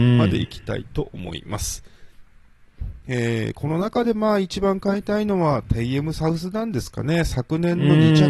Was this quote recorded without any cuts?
yes; 0 cuts

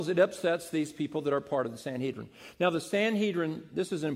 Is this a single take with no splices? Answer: yes; 0 cuts

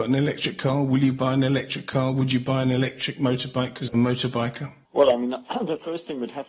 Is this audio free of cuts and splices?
no; 1 cut; at 3.9 s

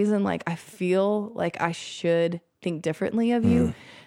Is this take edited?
no; 0 cuts

